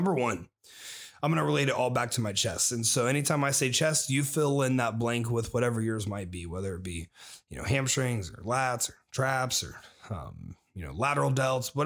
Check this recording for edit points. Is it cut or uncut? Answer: uncut